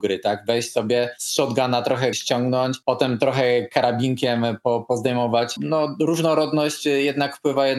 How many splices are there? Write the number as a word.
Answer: one